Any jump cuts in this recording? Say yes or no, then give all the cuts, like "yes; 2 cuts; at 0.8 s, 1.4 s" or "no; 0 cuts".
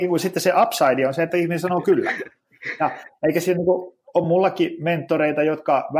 no; 0 cuts